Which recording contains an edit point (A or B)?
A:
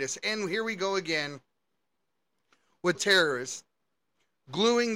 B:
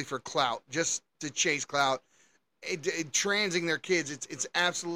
A